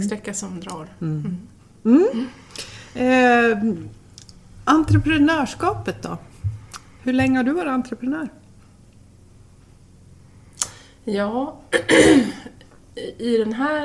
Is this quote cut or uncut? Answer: uncut